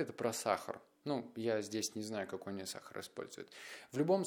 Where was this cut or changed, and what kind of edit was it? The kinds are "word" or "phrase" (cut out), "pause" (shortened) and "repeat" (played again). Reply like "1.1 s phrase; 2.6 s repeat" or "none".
none